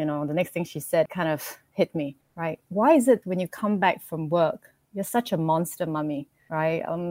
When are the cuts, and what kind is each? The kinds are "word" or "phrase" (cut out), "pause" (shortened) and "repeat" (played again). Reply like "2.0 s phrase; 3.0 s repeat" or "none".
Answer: 1.1 s word; 3.2 s word